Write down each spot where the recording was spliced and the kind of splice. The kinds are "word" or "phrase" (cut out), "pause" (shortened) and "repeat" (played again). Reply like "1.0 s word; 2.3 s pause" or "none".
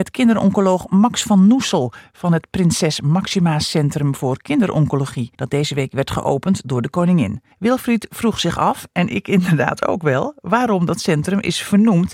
5.3 s pause; 7.5 s pause